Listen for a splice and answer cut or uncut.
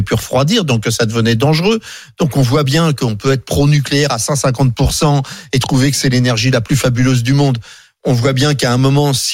uncut